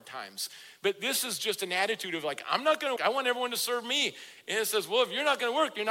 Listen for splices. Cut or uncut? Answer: cut